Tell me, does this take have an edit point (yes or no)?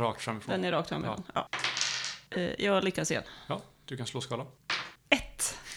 no